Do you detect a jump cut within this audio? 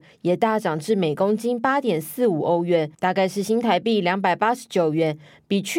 yes; 1 cut; at 2.9 s

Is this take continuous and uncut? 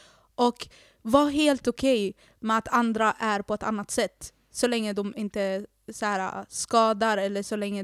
yes; 0 cuts

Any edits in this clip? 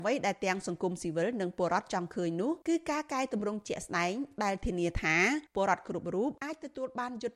yes; 3 cuts; at 2.6 s, 5.5 s, 6.4 s

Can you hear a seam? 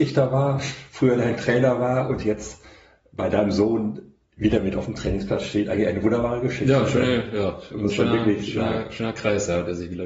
no; 0 cuts

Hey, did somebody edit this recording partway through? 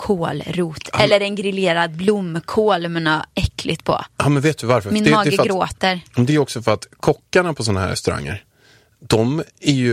no; 0 cuts

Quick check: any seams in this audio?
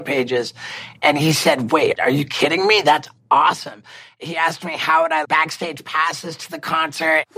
yes; 1 cut; at 5.2 s

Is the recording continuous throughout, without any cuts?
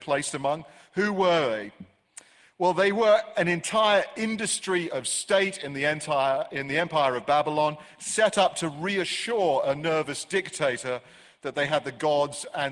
yes; 0 cuts

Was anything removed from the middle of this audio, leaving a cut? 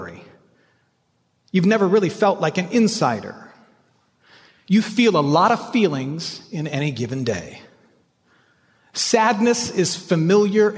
no; 0 cuts

